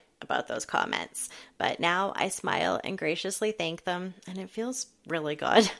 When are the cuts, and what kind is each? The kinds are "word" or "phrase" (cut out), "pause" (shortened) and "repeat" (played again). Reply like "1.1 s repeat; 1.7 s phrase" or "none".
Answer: none